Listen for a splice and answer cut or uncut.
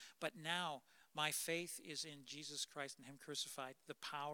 uncut